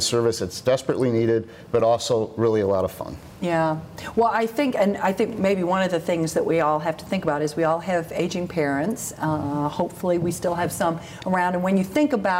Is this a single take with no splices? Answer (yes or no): yes